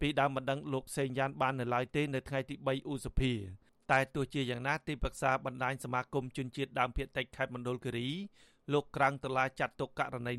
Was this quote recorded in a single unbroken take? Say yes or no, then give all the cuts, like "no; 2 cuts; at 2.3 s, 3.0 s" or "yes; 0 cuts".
yes; 0 cuts